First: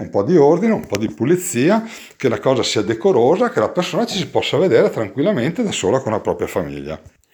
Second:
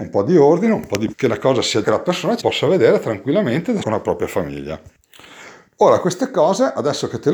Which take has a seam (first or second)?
second